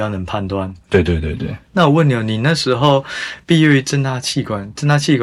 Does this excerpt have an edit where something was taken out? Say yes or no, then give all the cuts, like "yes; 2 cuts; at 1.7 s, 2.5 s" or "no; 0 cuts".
yes; 1 cut; at 1.6 s